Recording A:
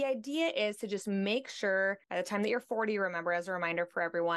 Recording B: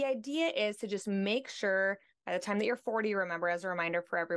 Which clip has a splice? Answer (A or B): A